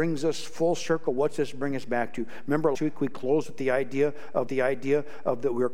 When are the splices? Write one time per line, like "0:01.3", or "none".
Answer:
0:02.7
0:04.5